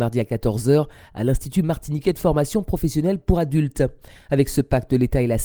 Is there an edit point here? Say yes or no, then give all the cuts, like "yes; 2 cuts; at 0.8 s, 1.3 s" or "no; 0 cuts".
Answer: no; 0 cuts